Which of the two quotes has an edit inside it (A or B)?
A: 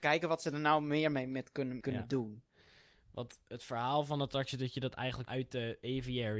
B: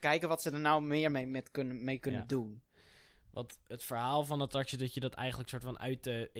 A